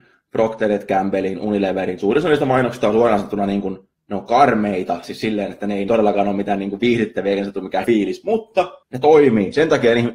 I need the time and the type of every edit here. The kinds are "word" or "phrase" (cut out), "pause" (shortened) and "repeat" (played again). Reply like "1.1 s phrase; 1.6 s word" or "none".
3.9 s pause; 5.9 s phrase; 7.8 s word; 8.8 s pause